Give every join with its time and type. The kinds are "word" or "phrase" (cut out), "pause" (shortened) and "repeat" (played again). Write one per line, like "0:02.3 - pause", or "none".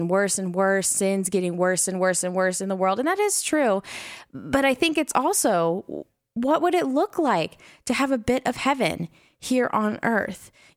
none